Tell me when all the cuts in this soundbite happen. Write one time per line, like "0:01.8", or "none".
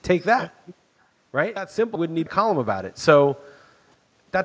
0:01.6
0:02.0
0:02.3